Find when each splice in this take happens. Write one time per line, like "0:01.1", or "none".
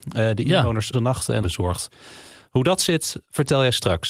0:00.9
0:01.4